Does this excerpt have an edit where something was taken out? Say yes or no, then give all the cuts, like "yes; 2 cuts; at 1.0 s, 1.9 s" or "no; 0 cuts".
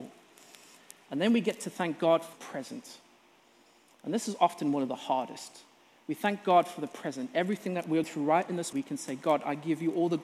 yes; 3 cuts; at 2.3 s, 8.0 s, 8.7 s